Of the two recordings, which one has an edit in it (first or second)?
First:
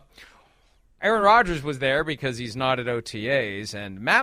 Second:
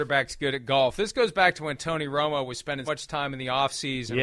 second